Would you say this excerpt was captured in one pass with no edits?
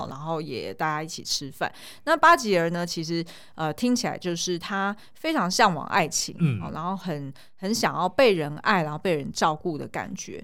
yes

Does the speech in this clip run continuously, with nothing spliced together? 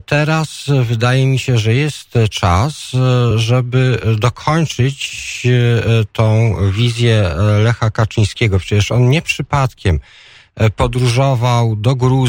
yes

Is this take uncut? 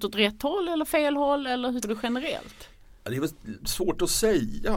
no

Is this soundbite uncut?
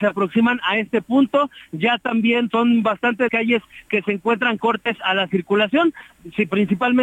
no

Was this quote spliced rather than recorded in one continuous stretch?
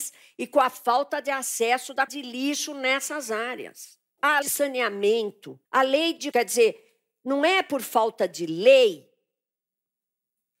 yes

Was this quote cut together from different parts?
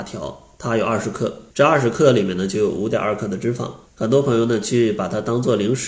yes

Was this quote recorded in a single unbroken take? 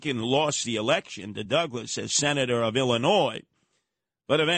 yes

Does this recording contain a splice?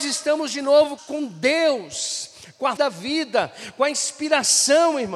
yes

